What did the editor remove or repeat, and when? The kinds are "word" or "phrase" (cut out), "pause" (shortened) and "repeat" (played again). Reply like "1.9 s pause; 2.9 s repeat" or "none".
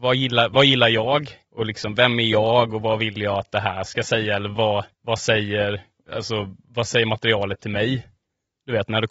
1.4 s pause; 4.9 s pause; 6.6 s pause